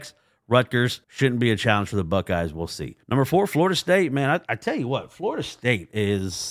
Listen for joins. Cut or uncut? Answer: cut